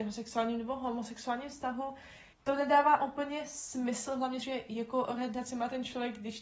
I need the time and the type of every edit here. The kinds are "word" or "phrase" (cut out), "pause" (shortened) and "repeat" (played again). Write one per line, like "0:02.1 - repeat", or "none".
0:02.3 - pause
0:04.4 - phrase